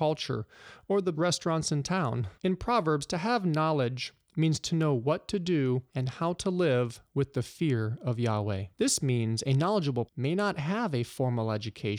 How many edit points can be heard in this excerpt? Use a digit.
5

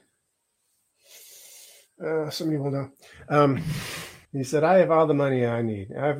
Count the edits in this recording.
1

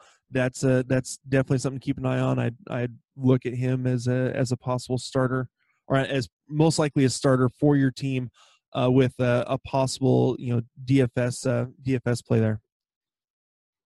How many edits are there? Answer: 0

